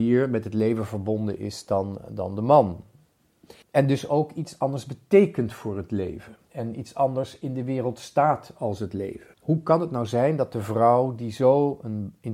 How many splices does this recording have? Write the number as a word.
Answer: three